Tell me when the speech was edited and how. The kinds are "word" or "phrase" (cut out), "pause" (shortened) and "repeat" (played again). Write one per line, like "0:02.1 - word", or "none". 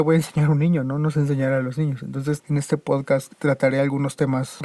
0:02.4 - word